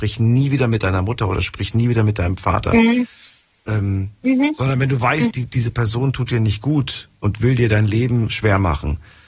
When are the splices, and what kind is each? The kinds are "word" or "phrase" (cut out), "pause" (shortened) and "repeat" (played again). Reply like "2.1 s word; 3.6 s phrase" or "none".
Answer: 5.3 s word